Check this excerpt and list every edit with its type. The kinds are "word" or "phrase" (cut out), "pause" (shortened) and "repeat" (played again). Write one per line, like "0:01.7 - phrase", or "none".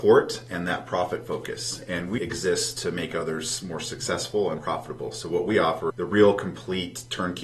0:02.2 - word
0:04.6 - word
0:05.9 - word